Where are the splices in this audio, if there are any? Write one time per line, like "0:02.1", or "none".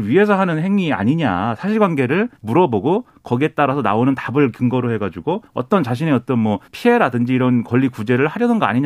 0:02.4
0:05.5
0:06.7